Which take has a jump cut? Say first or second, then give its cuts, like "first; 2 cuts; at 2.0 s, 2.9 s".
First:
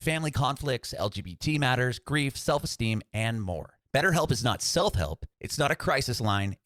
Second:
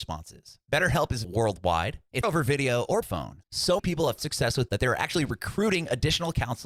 second; 6 cuts; at 1.2 s, 2.2 s, 3.0 s, 3.8 s, 4.2 s, 4.7 s